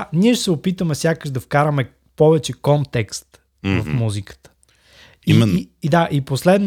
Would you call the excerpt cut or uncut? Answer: uncut